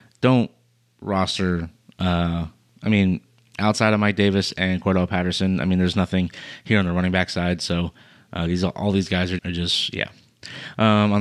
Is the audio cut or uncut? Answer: cut